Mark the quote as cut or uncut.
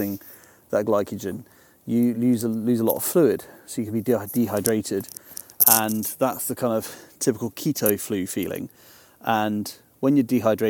uncut